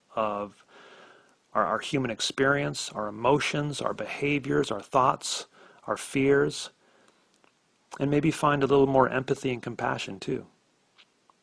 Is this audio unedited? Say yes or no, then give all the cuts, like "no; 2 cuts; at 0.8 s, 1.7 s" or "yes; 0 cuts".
yes; 0 cuts